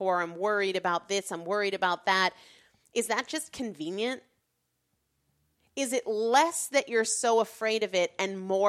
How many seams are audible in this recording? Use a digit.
0